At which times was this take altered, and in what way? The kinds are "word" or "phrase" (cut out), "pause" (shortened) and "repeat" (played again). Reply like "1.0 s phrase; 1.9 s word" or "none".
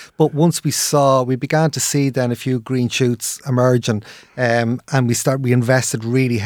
none